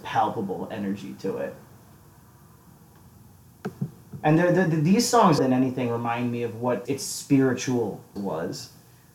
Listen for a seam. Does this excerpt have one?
yes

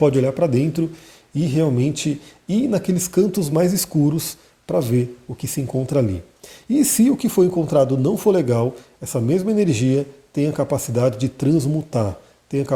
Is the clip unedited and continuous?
yes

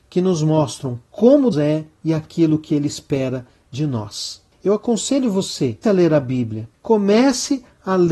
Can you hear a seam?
yes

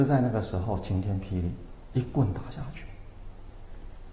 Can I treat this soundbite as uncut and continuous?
no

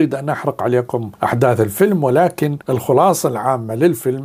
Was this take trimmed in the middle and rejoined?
yes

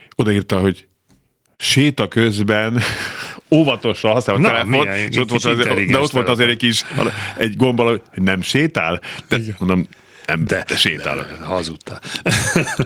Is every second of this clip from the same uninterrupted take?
yes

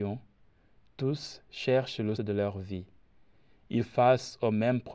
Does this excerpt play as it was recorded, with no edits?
no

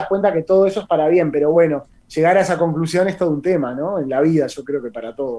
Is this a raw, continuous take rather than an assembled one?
yes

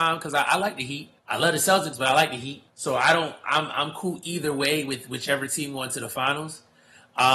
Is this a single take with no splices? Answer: no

